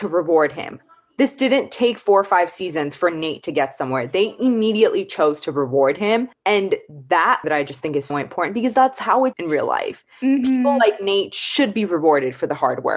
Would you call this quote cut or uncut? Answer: cut